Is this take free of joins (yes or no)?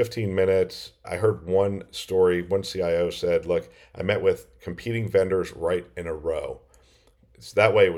yes